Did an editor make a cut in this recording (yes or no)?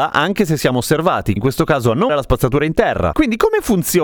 yes